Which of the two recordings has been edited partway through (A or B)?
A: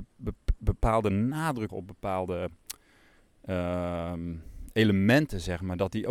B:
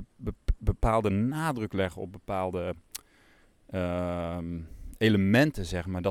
A